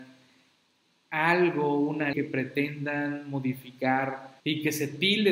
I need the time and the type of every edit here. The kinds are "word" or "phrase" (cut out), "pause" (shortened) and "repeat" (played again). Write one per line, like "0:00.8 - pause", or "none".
0:02.1 - word
0:04.4 - pause